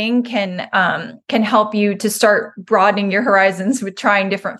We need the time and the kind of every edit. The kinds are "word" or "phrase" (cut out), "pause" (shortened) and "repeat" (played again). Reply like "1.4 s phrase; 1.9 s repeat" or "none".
1.2 s pause; 2.0 s word